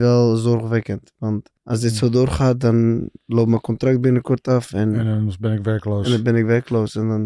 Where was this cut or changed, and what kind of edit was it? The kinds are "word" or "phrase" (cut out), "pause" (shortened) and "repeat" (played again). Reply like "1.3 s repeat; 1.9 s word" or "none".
1.6 s pause; 3.2 s pause